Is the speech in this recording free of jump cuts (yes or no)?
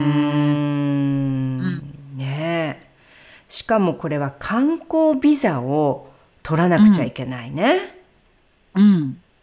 yes